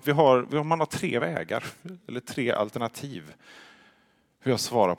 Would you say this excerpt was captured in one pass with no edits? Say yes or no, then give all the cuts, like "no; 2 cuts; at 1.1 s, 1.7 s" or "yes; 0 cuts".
yes; 0 cuts